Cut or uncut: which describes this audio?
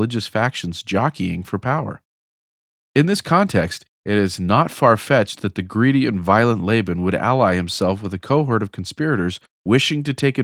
uncut